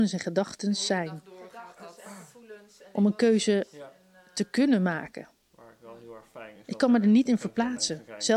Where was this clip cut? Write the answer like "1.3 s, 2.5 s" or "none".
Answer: none